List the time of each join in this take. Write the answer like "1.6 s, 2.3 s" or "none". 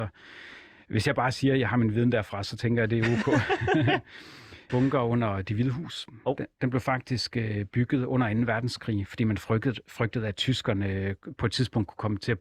4.7 s